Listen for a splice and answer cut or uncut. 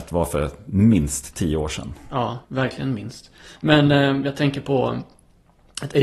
cut